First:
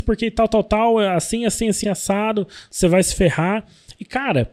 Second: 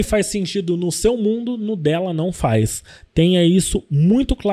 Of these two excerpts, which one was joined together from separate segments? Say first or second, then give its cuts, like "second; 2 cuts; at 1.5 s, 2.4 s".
first; 1 cut; at 1.8 s